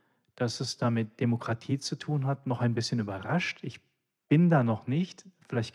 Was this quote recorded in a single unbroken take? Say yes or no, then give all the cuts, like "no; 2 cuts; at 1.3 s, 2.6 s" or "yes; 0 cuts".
yes; 0 cuts